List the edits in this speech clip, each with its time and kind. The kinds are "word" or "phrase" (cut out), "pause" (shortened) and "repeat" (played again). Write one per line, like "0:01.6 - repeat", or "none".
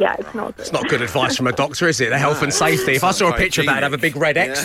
none